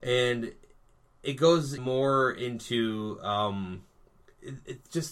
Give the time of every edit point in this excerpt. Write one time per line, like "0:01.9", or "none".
0:01.8

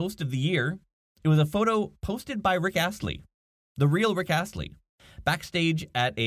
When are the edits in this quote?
none

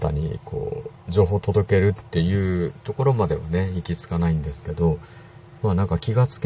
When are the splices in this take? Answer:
none

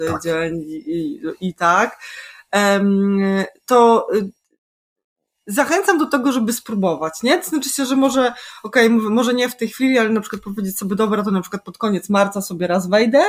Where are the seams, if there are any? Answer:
none

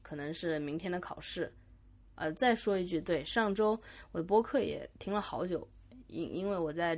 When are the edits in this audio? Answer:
none

